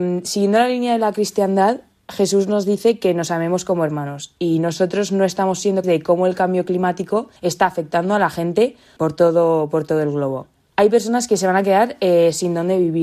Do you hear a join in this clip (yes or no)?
yes